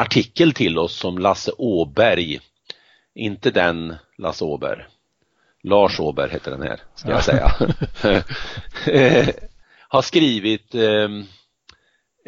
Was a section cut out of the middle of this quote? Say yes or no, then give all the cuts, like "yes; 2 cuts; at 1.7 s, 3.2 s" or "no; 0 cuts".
no; 0 cuts